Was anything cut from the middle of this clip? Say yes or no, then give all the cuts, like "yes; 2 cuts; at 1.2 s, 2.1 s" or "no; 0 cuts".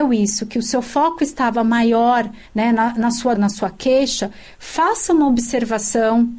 yes; 2 cuts; at 2.5 s, 3.3 s